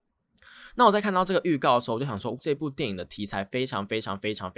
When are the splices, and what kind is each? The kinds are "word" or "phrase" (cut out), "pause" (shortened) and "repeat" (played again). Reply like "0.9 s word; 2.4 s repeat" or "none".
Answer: 2.4 s word